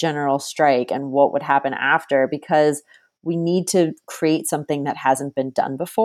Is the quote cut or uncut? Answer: uncut